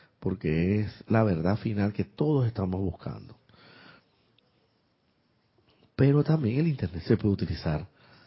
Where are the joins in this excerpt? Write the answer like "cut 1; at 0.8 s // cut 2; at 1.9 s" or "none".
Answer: none